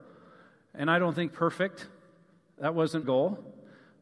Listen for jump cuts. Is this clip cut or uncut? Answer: cut